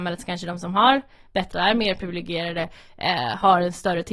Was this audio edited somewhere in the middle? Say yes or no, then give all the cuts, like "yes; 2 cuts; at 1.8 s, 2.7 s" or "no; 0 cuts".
yes; 1 cut; at 1.5 s